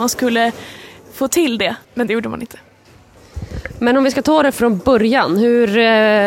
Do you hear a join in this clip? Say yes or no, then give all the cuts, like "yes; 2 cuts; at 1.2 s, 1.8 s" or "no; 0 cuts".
yes; 2 cuts; at 1.8 s, 4.5 s